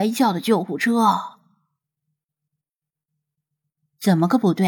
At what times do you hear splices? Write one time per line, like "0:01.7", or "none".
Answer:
none